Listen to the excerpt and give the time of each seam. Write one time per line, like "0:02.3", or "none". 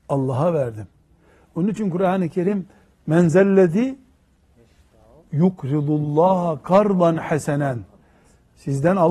none